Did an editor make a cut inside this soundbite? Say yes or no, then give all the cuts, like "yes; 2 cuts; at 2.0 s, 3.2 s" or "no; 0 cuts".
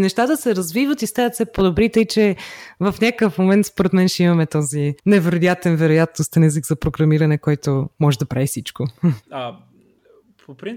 yes; 2 cuts; at 5.0 s, 9.2 s